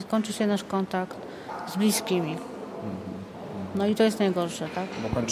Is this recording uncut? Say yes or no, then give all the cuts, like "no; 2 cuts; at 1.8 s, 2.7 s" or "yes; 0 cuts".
yes; 0 cuts